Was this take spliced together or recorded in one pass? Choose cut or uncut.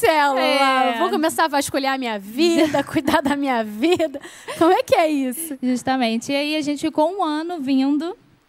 uncut